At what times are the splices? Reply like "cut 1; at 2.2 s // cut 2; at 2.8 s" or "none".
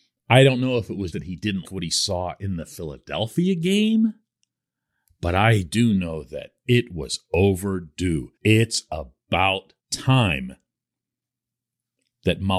cut 1; at 1.1 s // cut 2; at 1.6 s // cut 3; at 8.4 s // cut 4; at 9.8 s